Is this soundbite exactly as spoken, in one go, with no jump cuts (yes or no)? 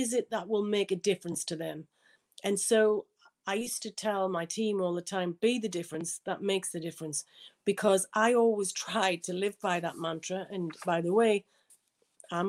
yes